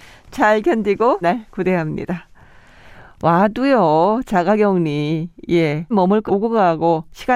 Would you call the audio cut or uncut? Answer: cut